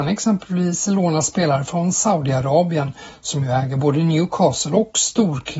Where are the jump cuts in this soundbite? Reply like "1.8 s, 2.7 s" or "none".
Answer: none

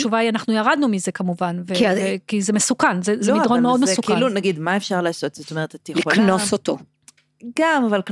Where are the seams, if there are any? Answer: none

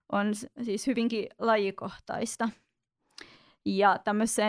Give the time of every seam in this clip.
none

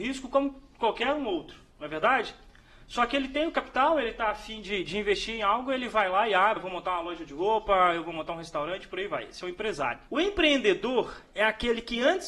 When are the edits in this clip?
6.6 s, 10.1 s

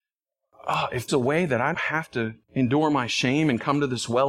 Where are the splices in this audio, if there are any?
1.1 s, 1.7 s, 2.4 s

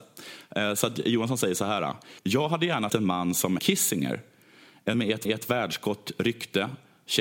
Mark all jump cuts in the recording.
2.2 s, 2.9 s, 3.6 s, 4.9 s, 5.2 s

